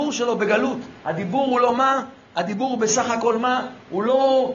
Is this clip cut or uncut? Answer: cut